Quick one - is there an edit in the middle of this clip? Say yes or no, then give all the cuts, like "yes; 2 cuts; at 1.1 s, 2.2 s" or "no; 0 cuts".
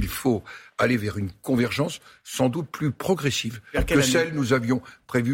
no; 0 cuts